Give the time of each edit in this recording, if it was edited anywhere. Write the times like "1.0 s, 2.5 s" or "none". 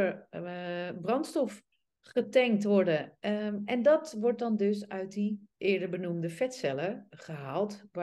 1.7 s, 5.5 s